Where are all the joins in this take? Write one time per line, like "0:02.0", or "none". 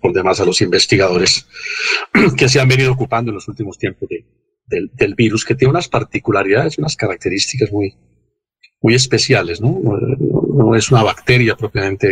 none